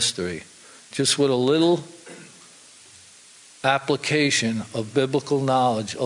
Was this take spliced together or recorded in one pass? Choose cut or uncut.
uncut